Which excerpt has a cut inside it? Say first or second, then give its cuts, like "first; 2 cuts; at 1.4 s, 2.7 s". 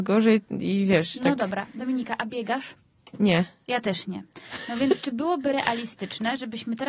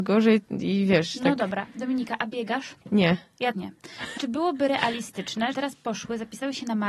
second; 4 cuts; at 2.8 s, 3.5 s, 4.2 s, 5.5 s